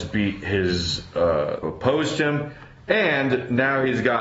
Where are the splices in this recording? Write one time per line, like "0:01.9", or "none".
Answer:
0:01.6